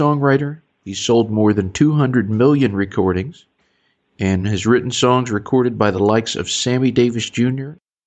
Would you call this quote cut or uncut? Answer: uncut